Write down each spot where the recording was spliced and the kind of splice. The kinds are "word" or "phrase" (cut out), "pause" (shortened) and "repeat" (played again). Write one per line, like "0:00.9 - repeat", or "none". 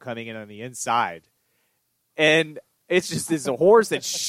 none